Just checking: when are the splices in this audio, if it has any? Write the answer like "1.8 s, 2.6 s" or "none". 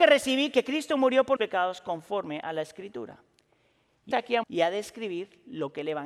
1.4 s, 4.1 s, 4.4 s